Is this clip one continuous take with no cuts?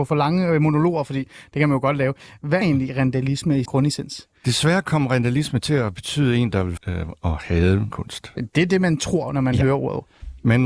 no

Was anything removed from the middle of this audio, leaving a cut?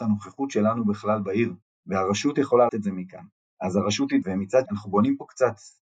yes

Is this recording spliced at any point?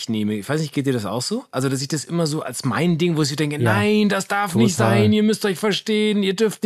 no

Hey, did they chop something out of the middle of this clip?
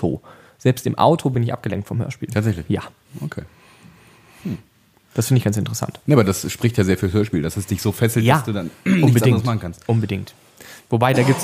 no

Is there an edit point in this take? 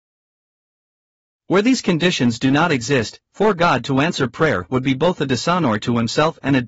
no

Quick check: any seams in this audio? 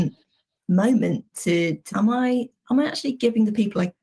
yes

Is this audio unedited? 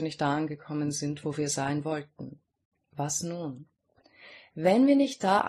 yes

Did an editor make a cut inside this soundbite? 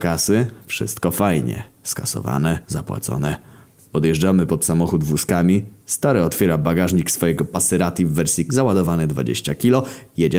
yes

